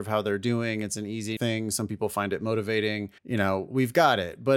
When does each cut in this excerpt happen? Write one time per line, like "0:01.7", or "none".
0:01.4
0:03.2